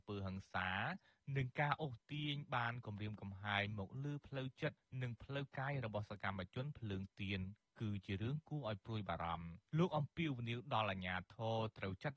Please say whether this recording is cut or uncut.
cut